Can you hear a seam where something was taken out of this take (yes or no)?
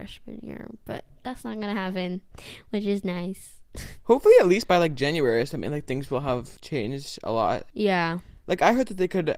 no